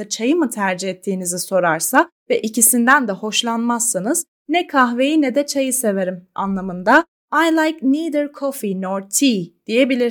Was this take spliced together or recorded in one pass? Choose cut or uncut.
uncut